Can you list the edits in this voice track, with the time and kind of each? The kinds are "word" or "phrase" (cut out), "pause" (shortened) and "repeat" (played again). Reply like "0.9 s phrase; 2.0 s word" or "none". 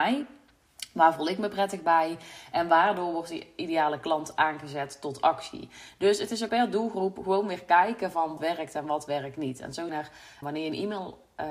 6.5 s word; 8.4 s word; 9.9 s word; 10.4 s word